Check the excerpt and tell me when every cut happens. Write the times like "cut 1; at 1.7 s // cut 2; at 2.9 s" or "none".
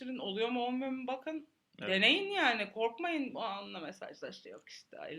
none